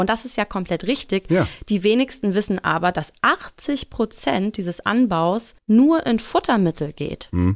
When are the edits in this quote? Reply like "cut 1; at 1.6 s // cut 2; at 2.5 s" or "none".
cut 1; at 5.6 s